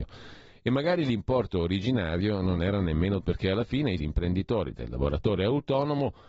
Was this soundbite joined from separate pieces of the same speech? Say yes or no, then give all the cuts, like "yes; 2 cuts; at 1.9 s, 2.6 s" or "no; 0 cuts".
yes; 3 cuts; at 3.2 s, 4.0 s, 4.8 s